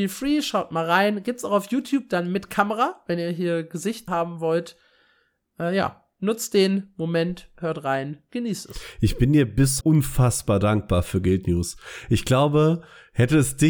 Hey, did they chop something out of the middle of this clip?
yes; 2 cuts; at 4.1 s, 9.8 s

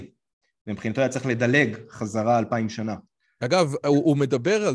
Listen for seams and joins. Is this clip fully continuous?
yes; 0 cuts

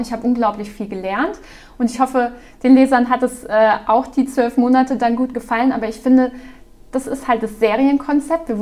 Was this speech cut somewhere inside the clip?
no; 0 cuts

